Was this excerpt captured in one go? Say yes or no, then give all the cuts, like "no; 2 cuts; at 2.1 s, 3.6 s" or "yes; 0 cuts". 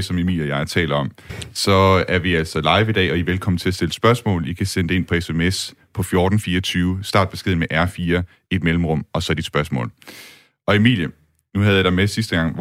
yes; 0 cuts